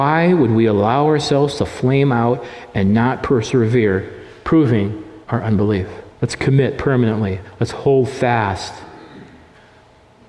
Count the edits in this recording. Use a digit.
2